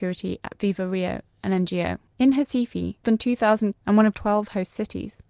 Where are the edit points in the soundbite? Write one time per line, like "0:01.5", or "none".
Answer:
0:02.1
0:03.0
0:03.7
0:04.1